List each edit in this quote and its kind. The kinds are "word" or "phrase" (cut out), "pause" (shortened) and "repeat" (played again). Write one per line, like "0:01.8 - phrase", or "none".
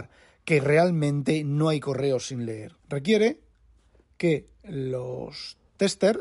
0:02.8 - pause